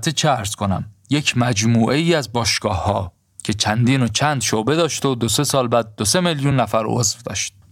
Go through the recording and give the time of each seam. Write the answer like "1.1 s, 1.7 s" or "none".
none